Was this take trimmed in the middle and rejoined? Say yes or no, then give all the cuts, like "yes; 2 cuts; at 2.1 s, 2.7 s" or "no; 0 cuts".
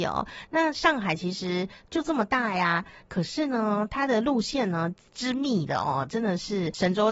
no; 0 cuts